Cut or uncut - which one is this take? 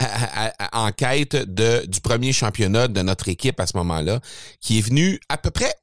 uncut